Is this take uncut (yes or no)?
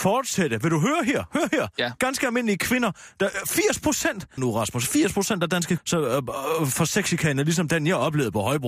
no